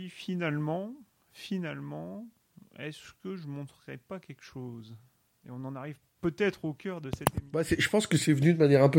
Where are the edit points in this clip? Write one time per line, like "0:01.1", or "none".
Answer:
none